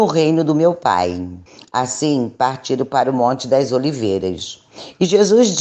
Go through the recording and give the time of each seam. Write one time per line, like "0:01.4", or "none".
0:01.5